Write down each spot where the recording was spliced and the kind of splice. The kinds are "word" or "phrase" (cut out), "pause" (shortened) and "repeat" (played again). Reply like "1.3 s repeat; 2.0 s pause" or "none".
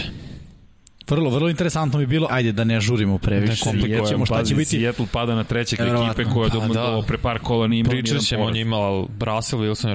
2.3 s word; 5.8 s phrase